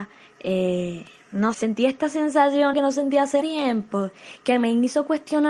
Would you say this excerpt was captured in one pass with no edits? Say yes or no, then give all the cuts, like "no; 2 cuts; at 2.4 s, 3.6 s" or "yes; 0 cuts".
no; 3 cuts; at 1.5 s, 2.7 s, 3.4 s